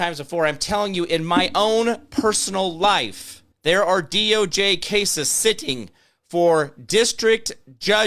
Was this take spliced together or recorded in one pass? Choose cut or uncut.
cut